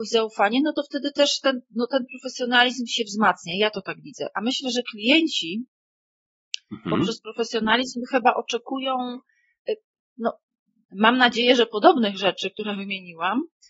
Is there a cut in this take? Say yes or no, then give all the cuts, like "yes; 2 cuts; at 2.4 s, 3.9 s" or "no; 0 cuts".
no; 0 cuts